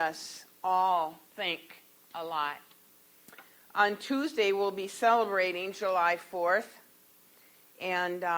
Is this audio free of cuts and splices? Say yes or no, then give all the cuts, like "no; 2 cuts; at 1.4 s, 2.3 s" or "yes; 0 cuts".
yes; 0 cuts